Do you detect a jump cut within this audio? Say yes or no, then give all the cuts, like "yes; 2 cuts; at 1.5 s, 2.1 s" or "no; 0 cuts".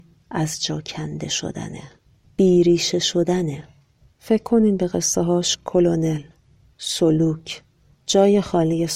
no; 0 cuts